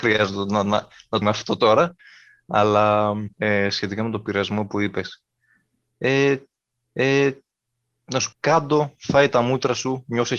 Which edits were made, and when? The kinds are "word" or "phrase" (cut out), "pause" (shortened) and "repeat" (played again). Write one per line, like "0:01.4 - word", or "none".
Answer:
0:01.2 - word
0:03.3 - pause
0:06.8 - repeat
0:08.3 - word